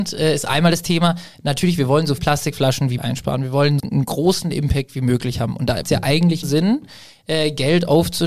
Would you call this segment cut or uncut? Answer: cut